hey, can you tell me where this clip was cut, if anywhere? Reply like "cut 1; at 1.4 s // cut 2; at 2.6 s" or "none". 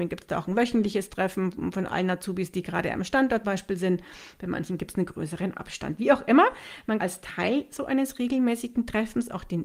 cut 1; at 3.4 s // cut 2; at 7.0 s

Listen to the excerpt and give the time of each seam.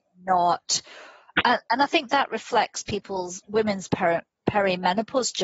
none

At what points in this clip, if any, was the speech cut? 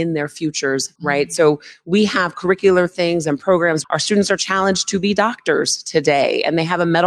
cut 1; at 1.0 s // cut 2; at 3.8 s

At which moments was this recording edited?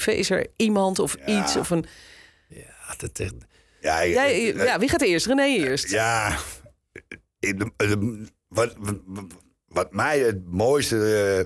none

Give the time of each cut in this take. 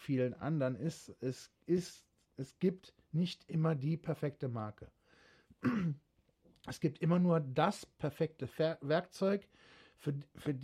none

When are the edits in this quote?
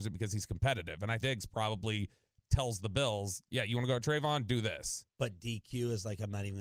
cut 1; at 1.2 s // cut 2; at 5.1 s

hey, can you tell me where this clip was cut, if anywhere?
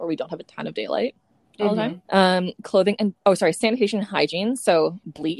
cut 1; at 2.0 s

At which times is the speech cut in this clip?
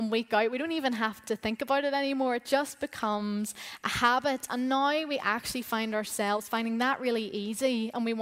none

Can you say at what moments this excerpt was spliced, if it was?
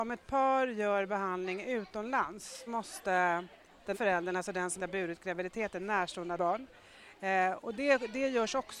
cut 1; at 2.7 s // cut 2; at 3.9 s // cut 3; at 4.8 s // cut 4; at 6.4 s

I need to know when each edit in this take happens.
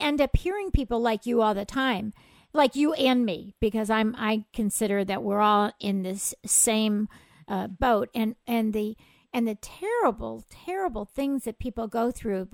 none

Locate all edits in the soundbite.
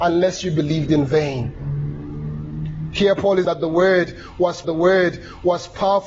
cut 1; at 3.4 s // cut 2; at 4.6 s

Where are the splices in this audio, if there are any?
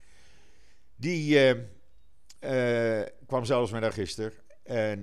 cut 1; at 3.9 s

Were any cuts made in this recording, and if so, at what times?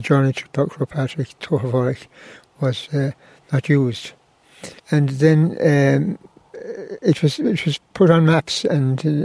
cut 1; at 4.8 s

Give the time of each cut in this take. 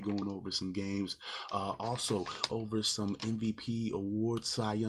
cut 1; at 2.5 s

